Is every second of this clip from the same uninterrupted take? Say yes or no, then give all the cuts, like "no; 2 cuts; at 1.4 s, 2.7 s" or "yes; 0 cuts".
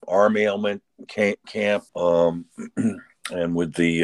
no; 3 cuts; at 1.1 s, 1.4 s, 1.9 s